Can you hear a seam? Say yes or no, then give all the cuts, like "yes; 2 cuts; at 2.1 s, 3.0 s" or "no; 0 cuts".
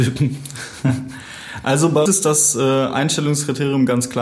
yes; 1 cut; at 2.1 s